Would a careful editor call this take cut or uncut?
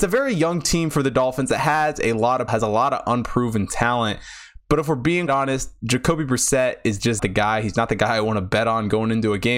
cut